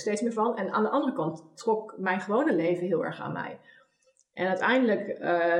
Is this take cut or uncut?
uncut